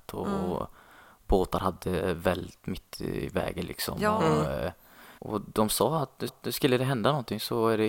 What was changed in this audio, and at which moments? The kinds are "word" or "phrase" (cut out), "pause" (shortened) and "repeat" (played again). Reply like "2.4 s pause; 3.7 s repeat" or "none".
2.9 s pause; 5.2 s pause; 6.3 s repeat